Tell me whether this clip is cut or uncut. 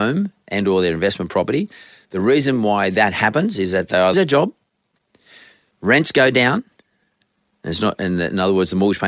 cut